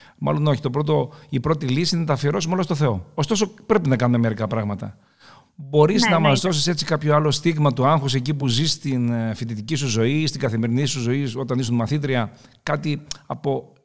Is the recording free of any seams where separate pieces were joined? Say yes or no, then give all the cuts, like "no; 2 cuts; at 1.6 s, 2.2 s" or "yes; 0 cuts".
yes; 0 cuts